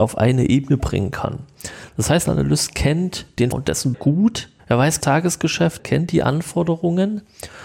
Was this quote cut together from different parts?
yes; 6 cuts; at 2.2 s, 3.5 s, 3.9 s, 4.6 s, 5.0 s, 5.8 s

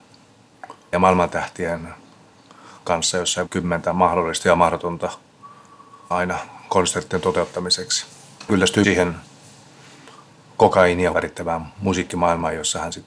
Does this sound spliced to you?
yes; 7 cuts; at 0.9 s, 2.8 s, 3.5 s, 6.1 s, 8.5 s, 8.8 s, 11.1 s

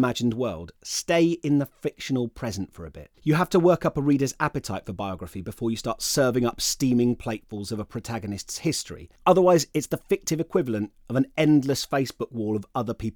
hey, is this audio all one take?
no; 2 cuts; at 3.1 s, 9.2 s

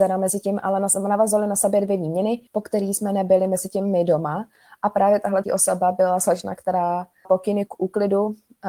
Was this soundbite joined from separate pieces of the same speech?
yes; 3 cuts; at 2.5 s, 5.4 s, 7.2 s

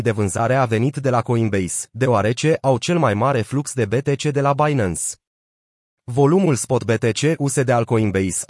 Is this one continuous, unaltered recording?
yes; 0 cuts

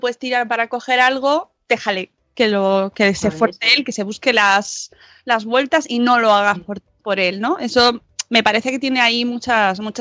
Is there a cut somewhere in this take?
no; 0 cuts

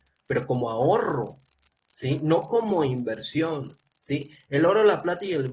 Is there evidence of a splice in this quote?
no; 0 cuts

